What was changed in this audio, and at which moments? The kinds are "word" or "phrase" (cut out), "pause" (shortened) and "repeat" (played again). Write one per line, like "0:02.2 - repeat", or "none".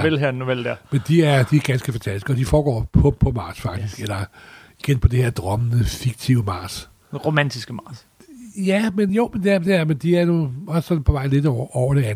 none